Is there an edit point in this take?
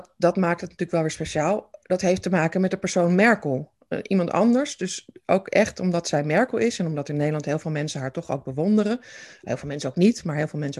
no; 0 cuts

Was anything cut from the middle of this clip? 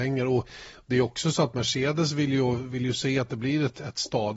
no; 0 cuts

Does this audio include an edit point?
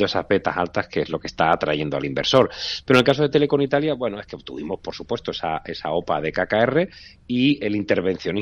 no; 0 cuts

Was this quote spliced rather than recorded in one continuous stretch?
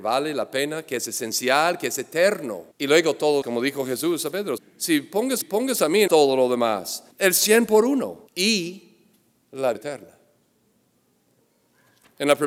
yes; 8 cuts; at 2.7 s, 3.4 s, 4.6 s, 5.4 s, 6.1 s, 7.1 s, 8.3 s, 9.7 s

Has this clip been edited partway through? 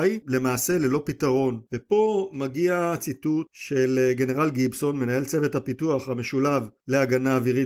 no; 0 cuts

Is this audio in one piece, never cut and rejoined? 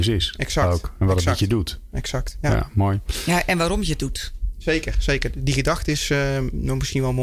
yes; 0 cuts

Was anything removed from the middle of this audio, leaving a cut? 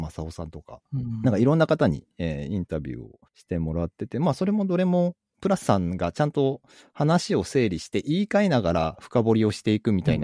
yes; 2 cuts; at 3.3 s, 5.6 s

